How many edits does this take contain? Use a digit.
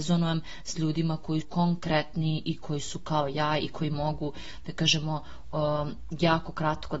1